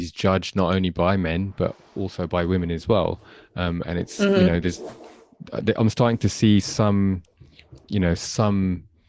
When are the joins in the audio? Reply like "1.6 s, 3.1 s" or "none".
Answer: none